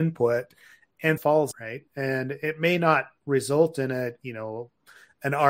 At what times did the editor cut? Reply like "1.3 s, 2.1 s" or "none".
1.2 s, 1.5 s